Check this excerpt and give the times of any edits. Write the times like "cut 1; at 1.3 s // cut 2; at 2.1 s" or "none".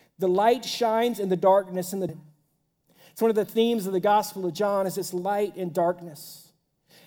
cut 1; at 2.1 s

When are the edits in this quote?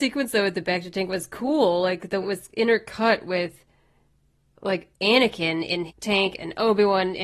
cut 1; at 2.2 s // cut 2; at 4.9 s // cut 3; at 5.9 s

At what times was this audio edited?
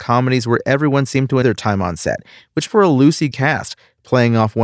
cut 1; at 1.4 s // cut 2; at 2.7 s // cut 3; at 3.3 s

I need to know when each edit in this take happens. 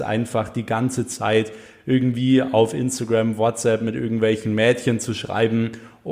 none

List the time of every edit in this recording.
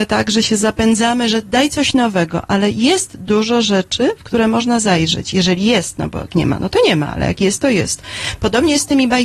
cut 1; at 6.3 s

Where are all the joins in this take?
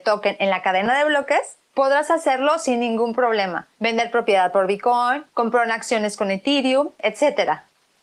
cut 1; at 1.6 s // cut 2; at 3.7 s // cut 3; at 5.3 s

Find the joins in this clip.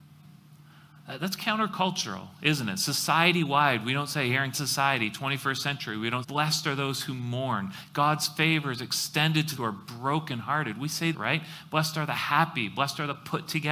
cut 1; at 4.5 s // cut 2; at 6.2 s // cut 3; at 9.6 s // cut 4; at 11.1 s

